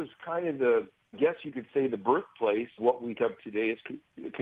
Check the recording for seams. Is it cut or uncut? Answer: cut